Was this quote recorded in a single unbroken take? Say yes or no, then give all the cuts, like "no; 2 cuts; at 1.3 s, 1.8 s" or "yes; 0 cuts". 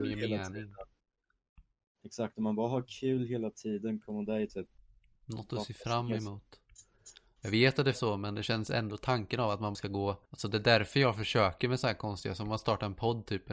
no; 3 cuts; at 7.9 s, 9.7 s, 10.2 s